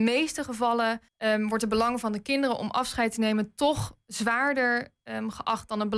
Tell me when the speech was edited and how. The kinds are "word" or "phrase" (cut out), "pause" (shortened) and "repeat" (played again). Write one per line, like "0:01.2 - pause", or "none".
0:01.1 - pause